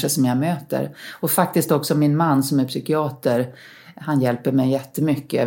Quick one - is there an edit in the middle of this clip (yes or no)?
no